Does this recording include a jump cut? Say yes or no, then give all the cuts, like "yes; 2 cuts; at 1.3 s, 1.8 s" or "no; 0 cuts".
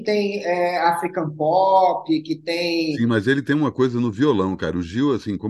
no; 0 cuts